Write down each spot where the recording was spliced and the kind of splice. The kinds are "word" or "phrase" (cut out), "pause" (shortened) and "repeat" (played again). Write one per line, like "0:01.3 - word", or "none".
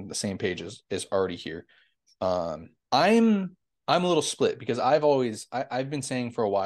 0:02.8 - pause